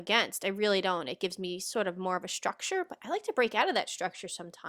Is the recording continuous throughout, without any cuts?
yes; 0 cuts

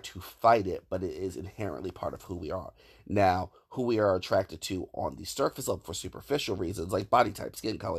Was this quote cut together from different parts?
no; 0 cuts

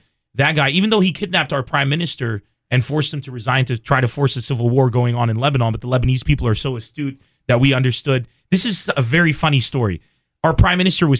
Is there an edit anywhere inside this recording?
no; 0 cuts

